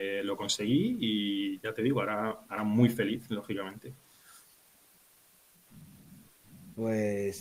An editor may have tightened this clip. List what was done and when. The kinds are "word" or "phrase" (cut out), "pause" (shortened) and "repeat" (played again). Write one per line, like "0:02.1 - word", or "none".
none